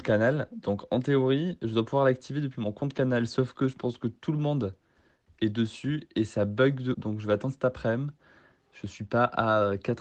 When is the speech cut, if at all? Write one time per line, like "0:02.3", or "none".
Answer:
0:06.9